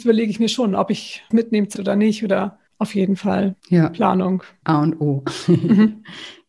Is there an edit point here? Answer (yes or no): yes